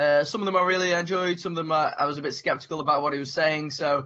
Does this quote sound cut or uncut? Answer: uncut